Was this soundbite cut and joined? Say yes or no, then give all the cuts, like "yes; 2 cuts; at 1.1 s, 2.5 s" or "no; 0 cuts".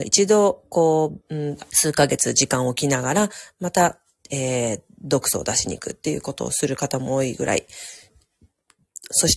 yes; 2 cuts; at 1.2 s, 1.7 s